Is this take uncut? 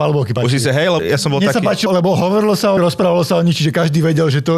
no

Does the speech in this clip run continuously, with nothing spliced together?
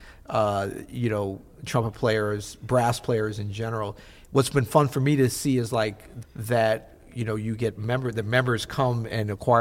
no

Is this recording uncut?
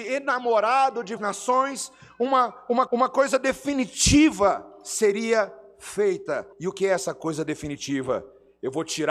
no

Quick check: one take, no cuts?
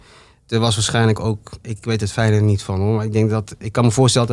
yes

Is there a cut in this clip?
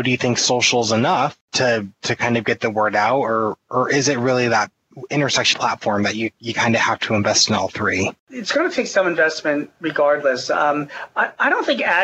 yes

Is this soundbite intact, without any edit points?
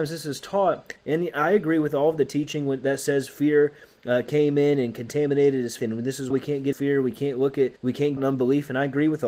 no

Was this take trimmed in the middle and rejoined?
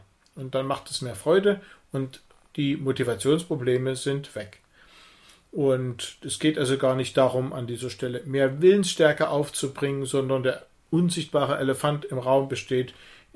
no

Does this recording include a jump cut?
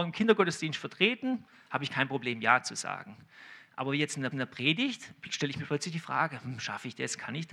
yes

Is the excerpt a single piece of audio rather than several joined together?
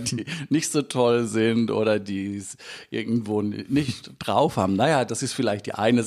yes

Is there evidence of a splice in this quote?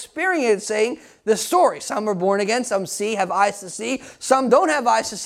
no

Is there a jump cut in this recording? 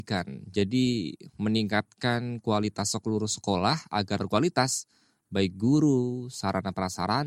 yes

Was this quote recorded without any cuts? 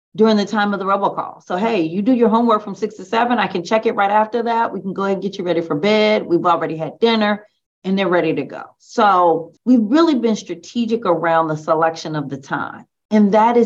no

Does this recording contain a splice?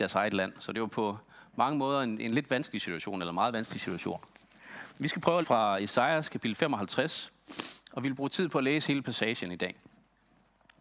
yes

